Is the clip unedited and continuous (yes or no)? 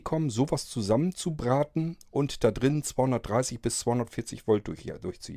yes